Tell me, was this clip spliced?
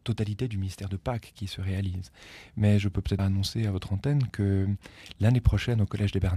yes; 1 cut; at 3.2 s

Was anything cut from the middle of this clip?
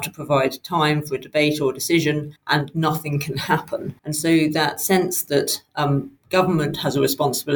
yes; 2 cuts; at 2.4 s, 4.0 s

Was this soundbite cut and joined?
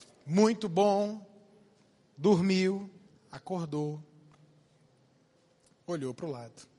yes; 1 cut; at 3.1 s

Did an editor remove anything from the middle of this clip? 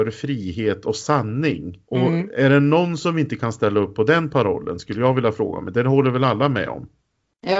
yes; 1 cut; at 1.8 s

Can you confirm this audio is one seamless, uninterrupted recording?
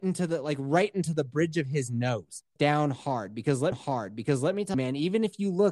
no; 3 cuts; at 2.6 s, 3.7 s, 4.7 s

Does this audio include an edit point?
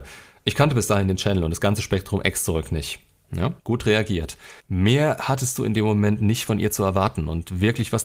yes; 2 cuts; at 3.6 s, 4.6 s

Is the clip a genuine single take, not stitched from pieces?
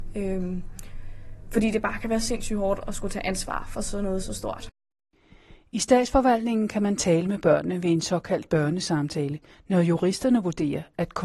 yes; 0 cuts

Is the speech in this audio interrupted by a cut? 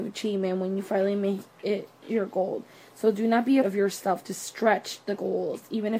yes; 1 cut; at 3.6 s

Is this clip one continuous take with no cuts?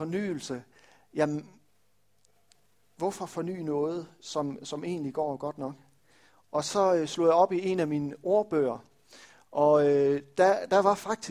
yes; 0 cuts

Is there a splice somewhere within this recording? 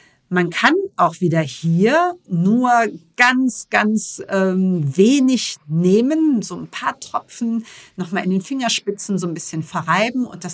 no; 0 cuts

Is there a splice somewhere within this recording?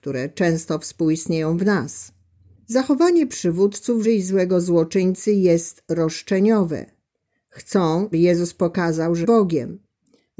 yes; 3 cuts; at 4.0 s, 8.1 s, 9.2 s

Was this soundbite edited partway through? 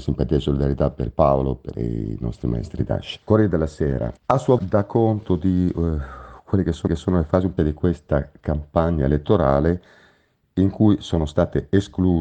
yes; 7 cuts; at 1.1 s, 1.7 s, 3.2 s, 4.2 s, 4.6 s, 6.9 s, 7.6 s

